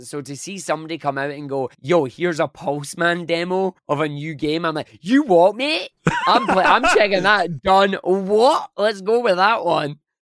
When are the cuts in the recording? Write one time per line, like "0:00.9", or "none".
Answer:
0:01.7
0:03.8
0:06.0